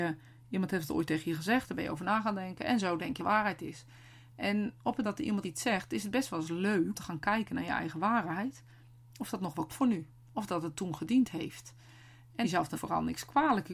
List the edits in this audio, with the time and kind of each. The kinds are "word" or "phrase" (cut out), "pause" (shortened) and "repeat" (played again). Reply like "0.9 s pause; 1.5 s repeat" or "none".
3.2 s word; 5.0 s word; 5.4 s word; 6.9 s word; 9.7 s word; 12.4 s word; 12.7 s word

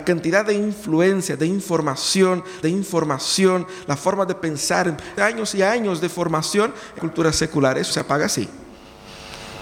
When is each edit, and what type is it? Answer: 2.6 s repeat; 5.2 s word; 7.0 s word; 7.9 s word

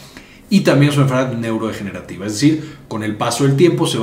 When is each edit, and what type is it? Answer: none

